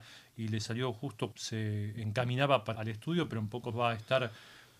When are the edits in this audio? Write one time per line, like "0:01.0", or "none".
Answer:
0:01.3
0:02.7
0:03.7